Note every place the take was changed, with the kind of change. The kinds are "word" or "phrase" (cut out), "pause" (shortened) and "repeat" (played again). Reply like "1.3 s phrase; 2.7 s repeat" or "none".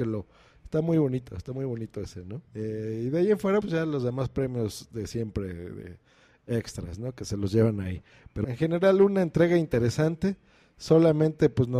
2.5 s pause; 3.6 s word; 8.4 s word